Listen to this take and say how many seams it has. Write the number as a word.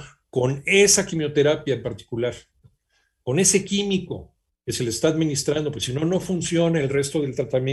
zero